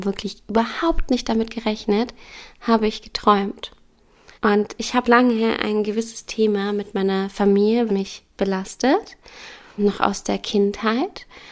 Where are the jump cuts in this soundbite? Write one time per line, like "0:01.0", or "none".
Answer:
0:04.3
0:05.0
0:07.9
0:09.8